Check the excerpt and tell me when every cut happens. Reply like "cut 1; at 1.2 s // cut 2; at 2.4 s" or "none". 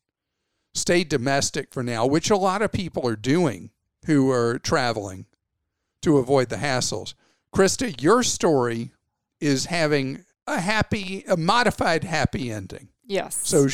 none